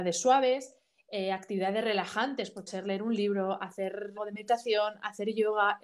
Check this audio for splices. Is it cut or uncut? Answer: cut